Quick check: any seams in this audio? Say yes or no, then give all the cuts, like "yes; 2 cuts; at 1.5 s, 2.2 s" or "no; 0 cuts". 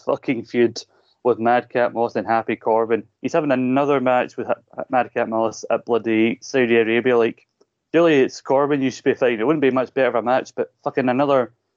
yes; 1 cut; at 3.1 s